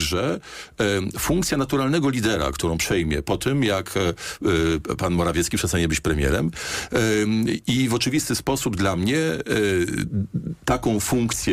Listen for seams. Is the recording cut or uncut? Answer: uncut